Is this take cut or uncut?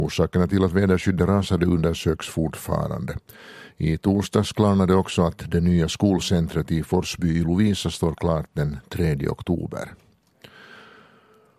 uncut